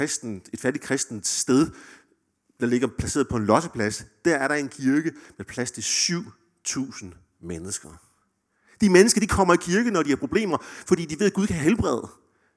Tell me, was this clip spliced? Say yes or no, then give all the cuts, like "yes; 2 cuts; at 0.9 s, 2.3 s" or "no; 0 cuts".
no; 0 cuts